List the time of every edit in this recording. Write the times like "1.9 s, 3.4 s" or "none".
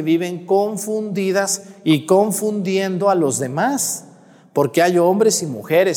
none

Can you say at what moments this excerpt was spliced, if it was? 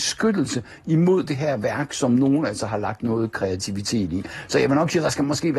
none

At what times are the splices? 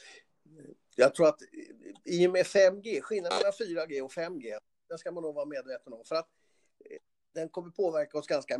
none

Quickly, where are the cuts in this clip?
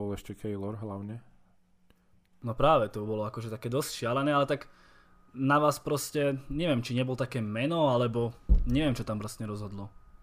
none

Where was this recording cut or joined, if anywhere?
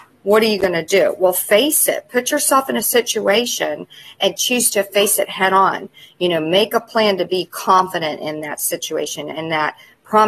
none

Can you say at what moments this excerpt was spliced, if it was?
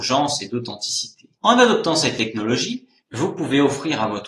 1.4 s

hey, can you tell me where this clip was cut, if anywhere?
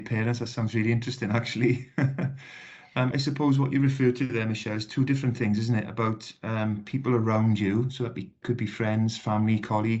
3.1 s

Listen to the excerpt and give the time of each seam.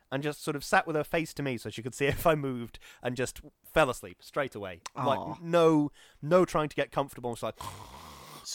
none

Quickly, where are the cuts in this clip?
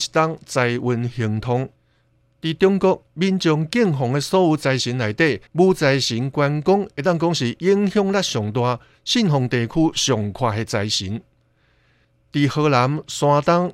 5.5 s

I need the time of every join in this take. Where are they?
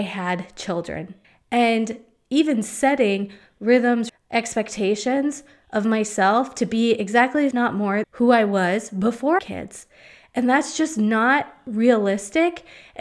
1.2 s, 4.1 s, 7.5 s, 8.0 s, 9.4 s

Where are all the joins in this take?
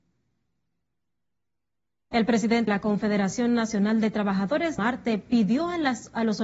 2.7 s, 4.8 s

